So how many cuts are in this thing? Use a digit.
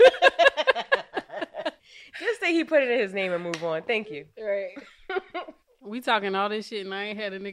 0